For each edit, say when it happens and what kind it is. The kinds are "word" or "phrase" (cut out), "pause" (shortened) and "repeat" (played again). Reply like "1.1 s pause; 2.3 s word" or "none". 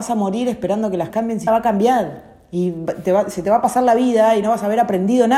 1.1 s word; 1.5 s word